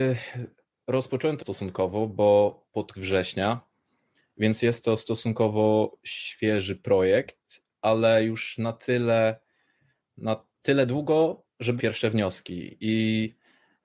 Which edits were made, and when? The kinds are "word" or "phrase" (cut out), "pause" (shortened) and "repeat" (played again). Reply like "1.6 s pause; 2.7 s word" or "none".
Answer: 1.4 s word; 2.9 s word; 10.5 s pause; 11.8 s word